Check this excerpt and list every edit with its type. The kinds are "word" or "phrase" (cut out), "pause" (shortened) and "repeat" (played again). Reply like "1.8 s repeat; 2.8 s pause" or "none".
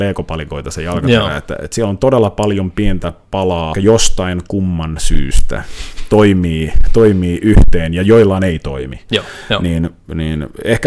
3.7 s phrase

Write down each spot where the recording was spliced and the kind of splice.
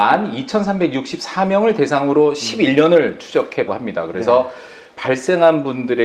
3.7 s word; 5.0 s word

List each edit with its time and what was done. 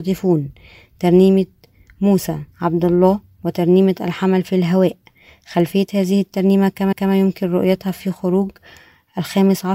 2.5 s pause; 6.9 s repeat

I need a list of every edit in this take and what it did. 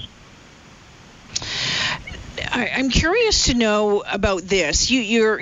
4.0 s word

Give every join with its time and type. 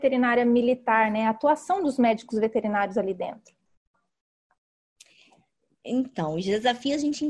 none

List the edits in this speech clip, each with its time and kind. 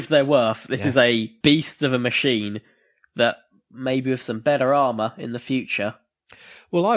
none

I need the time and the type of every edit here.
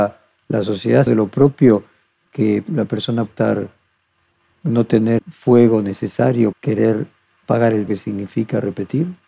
1.1 s word; 3.3 s word; 5.2 s word; 6.5 s word; 7.9 s word

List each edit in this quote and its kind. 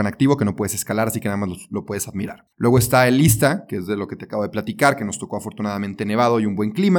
none

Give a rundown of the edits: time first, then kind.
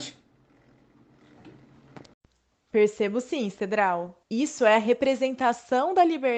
4.2 s pause

